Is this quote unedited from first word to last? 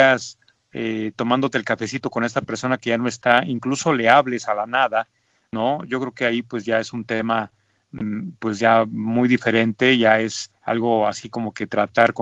no; 1 cut; at 10.6 s

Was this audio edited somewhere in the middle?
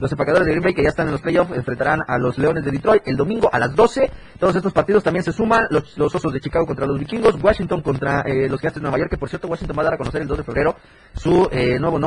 no; 0 cuts

